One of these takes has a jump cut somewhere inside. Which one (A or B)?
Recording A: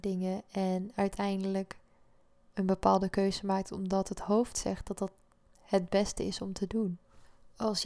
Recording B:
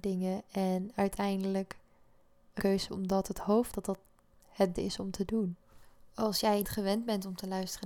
B